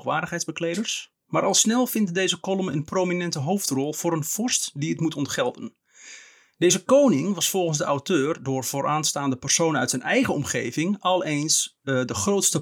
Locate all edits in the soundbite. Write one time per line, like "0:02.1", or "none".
none

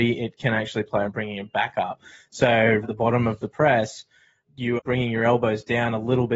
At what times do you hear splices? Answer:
0:01.0
0:02.8
0:04.4
0:04.8

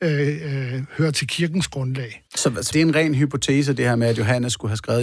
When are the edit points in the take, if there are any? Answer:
0:02.3
0:02.7

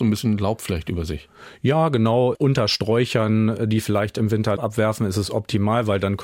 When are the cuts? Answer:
0:04.6

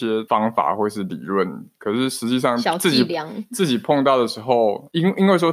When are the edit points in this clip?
0:01.8

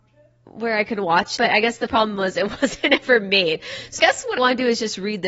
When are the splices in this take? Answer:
0:01.4
0:04.0
0:04.4

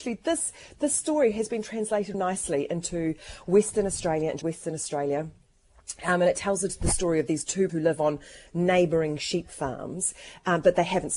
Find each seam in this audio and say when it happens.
0:02.1
0:04.4
0:06.7
0:07.7

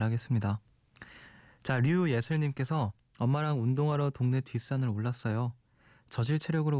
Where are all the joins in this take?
0:03.0

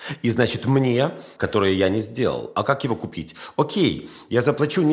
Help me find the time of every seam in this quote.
0:01.4

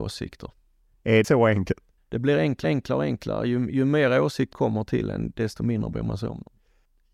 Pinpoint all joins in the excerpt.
0:01.2
0:02.0
0:02.6
0:04.5

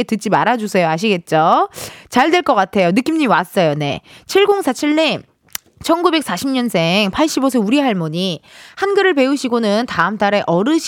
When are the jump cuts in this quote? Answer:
none

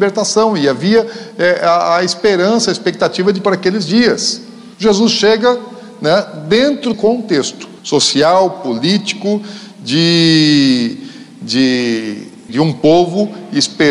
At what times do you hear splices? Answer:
0:03.5
0:04.7
0:06.9
0:07.8
0:12.5

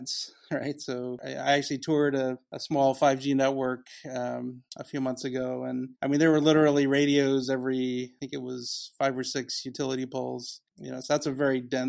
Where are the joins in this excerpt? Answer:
0:04.7
0:05.9
0:10.7

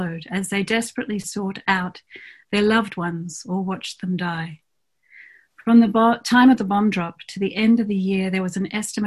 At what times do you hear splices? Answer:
none

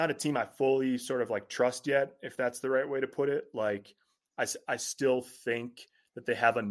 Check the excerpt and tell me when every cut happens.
none

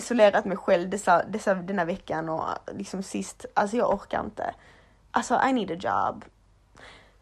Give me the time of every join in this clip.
none

